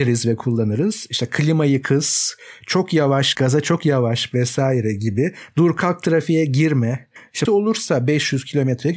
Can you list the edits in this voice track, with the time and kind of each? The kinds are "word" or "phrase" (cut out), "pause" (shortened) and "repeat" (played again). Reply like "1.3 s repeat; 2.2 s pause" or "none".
3.3 s word; 4.3 s word; 7.4 s phrase